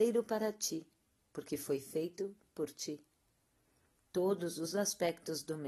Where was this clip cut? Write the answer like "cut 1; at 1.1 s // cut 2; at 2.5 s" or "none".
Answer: none